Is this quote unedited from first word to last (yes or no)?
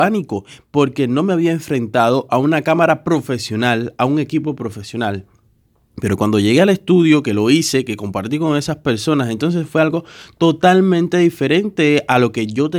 yes